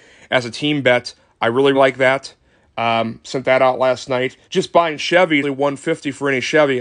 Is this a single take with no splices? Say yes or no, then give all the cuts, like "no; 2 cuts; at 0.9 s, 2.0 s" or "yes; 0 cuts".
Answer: no; 3 cuts; at 1.7 s, 4.4 s, 5.4 s